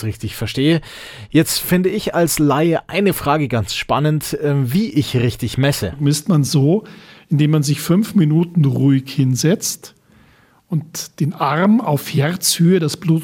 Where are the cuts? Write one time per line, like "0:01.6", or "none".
none